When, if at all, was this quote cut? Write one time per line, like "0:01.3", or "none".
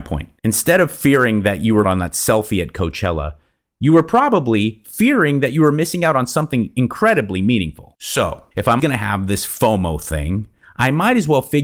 0:01.8
0:08.8